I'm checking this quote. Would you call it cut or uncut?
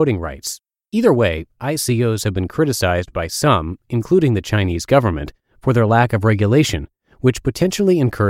uncut